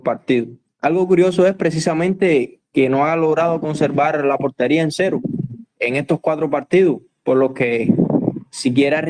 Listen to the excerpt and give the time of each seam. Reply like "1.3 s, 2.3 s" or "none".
none